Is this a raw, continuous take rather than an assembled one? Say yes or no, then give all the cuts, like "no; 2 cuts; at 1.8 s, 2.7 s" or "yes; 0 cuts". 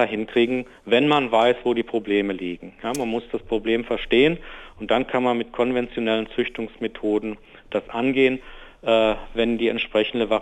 yes; 0 cuts